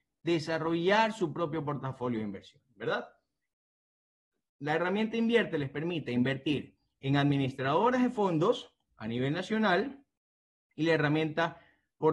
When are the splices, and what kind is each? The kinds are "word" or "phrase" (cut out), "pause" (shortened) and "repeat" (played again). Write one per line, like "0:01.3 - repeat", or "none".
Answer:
none